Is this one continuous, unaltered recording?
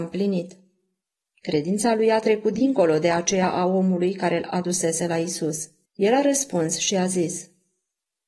no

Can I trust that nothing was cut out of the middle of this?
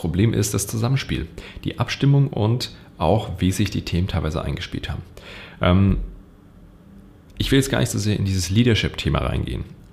yes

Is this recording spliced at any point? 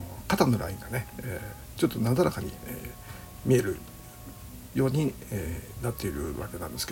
no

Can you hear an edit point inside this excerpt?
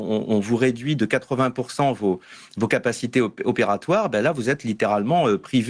no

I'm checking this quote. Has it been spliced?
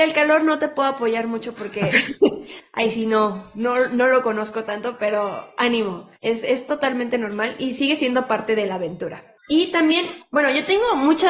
yes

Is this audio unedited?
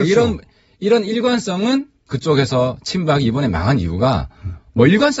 yes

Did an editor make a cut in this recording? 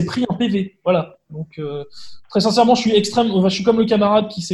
no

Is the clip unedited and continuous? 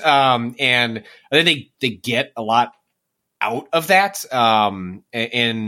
yes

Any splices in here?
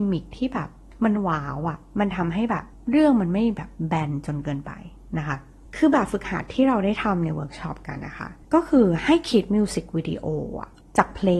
yes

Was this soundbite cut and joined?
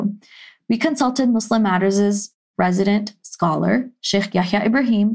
no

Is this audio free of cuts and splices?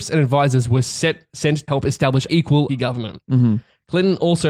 no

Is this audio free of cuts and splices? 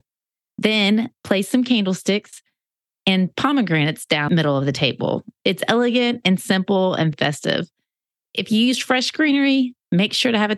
no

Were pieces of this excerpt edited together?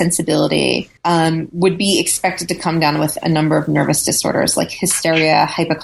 yes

